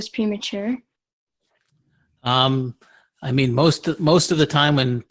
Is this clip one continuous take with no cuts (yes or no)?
yes